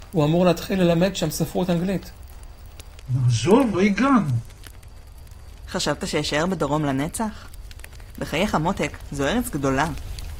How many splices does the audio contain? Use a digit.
1